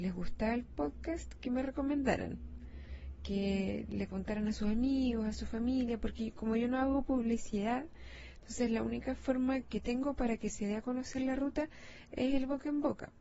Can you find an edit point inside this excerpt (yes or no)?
yes